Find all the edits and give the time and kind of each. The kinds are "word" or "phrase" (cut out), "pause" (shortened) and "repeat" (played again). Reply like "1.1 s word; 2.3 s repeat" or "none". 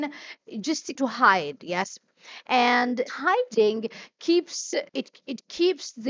1.0 s word; 3.1 s word; 4.9 s pause